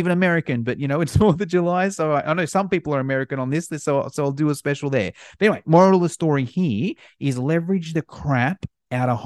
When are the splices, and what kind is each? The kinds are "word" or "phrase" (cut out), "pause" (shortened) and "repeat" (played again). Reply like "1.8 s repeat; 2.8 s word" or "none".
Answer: none